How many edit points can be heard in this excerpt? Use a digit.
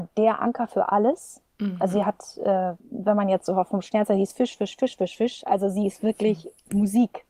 1